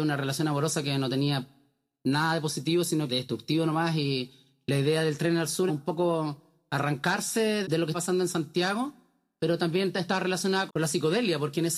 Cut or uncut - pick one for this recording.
cut